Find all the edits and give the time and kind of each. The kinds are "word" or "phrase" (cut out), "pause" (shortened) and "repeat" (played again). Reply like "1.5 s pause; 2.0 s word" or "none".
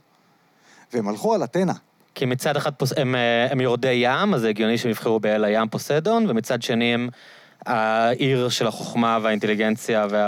none